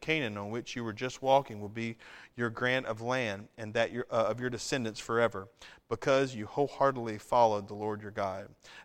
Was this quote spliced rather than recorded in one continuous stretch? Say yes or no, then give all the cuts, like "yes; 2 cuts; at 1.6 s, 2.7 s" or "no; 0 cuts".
no; 0 cuts